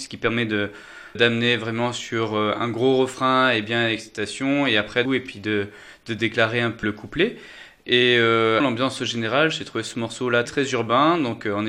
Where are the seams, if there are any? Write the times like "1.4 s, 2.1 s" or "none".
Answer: 1.1 s, 5.0 s, 6.8 s, 8.6 s, 10.4 s